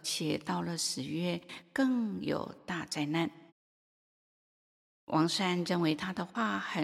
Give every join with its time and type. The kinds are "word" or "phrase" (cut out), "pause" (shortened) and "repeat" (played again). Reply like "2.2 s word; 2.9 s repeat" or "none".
3.5 s pause